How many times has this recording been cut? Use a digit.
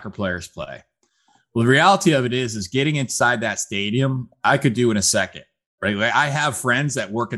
0